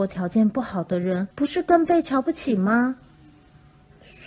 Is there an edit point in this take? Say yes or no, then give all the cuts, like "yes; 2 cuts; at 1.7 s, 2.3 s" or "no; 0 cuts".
yes; 1 cut; at 1.3 s